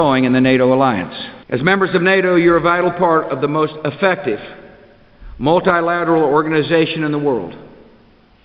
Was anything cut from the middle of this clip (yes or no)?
yes